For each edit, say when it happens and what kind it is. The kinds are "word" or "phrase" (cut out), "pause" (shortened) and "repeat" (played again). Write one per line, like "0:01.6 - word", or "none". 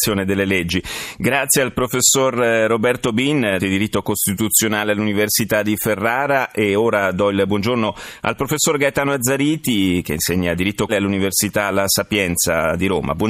0:03.6 - word
0:10.9 - word